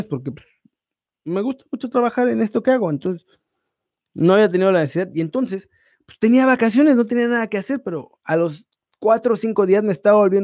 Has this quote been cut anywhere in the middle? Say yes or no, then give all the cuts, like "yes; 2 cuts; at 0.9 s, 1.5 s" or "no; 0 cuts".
no; 0 cuts